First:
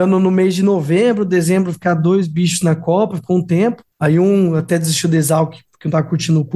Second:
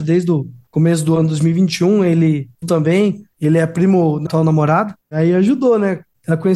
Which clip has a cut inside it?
second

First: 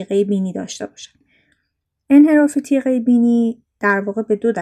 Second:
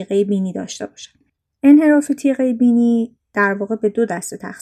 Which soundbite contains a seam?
second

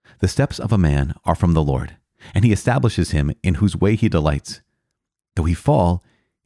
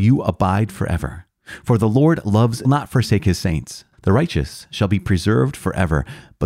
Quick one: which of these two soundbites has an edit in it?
second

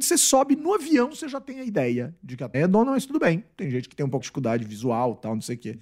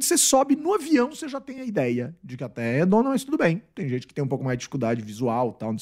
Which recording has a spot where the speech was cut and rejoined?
first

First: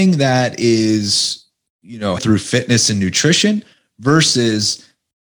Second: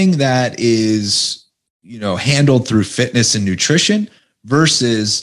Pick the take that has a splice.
first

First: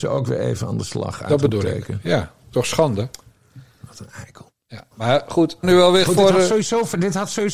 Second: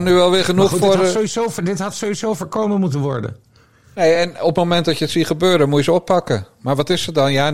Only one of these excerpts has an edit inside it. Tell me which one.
first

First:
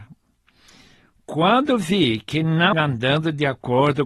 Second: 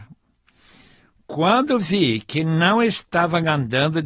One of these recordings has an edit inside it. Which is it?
first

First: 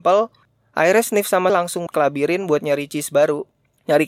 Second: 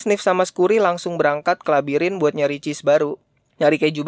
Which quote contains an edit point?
first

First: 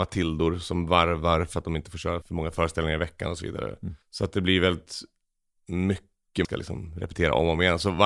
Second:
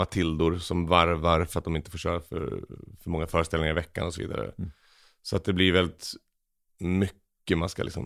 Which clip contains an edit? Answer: first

